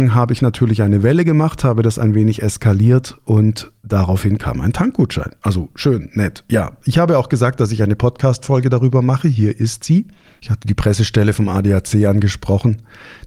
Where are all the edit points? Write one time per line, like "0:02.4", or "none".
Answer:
none